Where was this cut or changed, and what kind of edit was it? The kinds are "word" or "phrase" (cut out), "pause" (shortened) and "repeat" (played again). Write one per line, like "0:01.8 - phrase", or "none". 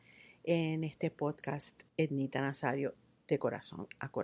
0:01.9 - word